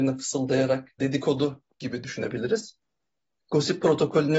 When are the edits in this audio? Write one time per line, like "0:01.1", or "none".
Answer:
0:01.0